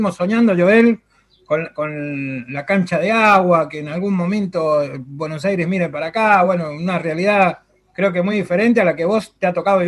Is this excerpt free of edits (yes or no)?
yes